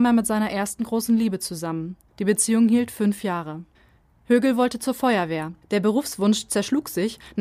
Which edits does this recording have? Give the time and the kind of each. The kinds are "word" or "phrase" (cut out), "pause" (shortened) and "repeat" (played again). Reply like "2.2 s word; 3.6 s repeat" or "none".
2.1 s pause; 3.7 s pause; 5.6 s pause